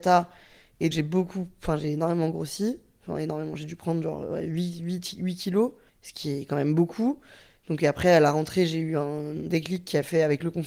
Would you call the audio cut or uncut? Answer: cut